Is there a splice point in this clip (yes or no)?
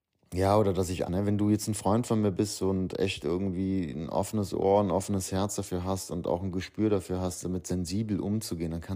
yes